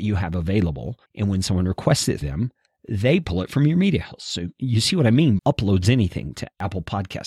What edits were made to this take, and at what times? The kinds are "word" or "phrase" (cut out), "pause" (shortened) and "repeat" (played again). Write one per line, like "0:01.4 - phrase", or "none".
0:01.1 - pause
0:02.2 - word
0:05.4 - phrase